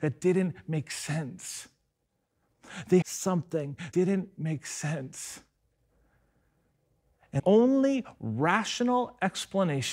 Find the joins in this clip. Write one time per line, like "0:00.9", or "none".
0:03.0
0:03.9
0:07.4

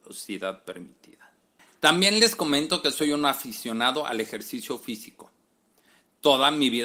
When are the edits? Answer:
none

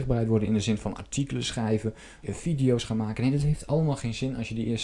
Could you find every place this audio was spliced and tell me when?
0:02.2

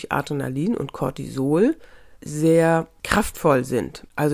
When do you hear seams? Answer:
none

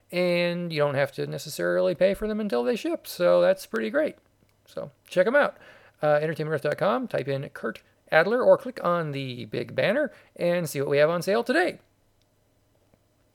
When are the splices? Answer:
none

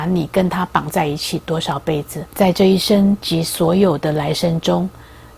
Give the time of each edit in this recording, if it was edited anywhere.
0:02.3

